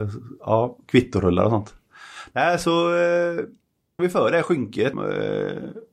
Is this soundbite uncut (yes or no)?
no